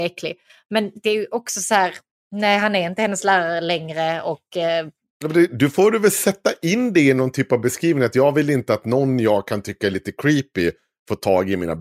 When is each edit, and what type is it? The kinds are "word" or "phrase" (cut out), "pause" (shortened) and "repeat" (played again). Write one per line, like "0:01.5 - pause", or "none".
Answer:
none